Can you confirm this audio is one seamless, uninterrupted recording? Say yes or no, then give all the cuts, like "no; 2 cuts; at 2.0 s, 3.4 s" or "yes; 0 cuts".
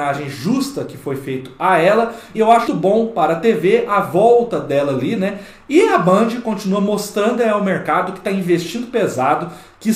no; 2 cuts; at 2.3 s, 2.7 s